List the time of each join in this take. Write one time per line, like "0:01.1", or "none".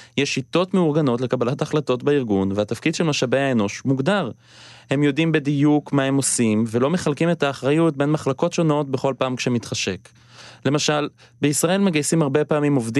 none